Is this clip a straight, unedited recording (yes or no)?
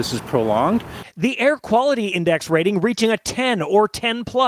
yes